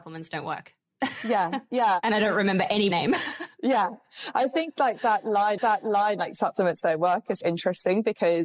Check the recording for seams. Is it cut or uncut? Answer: cut